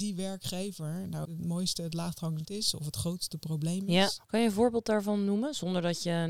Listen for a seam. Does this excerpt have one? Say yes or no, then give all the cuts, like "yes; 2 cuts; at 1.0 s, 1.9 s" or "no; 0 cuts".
yes; 3 cuts; at 1.2 s, 2.4 s, 4.2 s